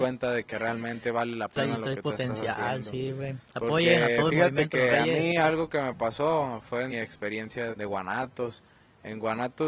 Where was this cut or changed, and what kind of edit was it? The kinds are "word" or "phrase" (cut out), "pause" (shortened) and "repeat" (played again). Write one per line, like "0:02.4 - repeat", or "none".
0:06.9 - word
0:07.7 - word